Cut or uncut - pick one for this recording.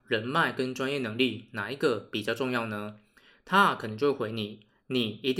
uncut